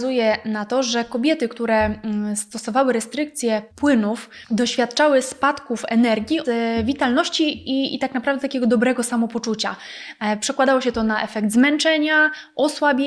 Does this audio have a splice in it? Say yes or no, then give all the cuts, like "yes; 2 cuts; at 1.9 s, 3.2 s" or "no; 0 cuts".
yes; 2 cuts; at 3.7 s, 6.4 s